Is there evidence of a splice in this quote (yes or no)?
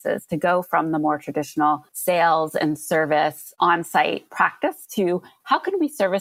yes